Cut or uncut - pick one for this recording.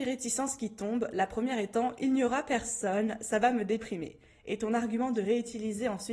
uncut